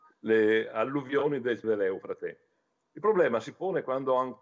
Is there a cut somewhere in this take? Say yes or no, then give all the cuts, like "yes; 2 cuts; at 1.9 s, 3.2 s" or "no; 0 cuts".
yes; 1 cut; at 1.6 s